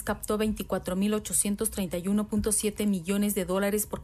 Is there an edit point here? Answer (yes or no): no